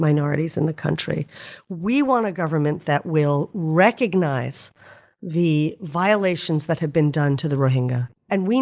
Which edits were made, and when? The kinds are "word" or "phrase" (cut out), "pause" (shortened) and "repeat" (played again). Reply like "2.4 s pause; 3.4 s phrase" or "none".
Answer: none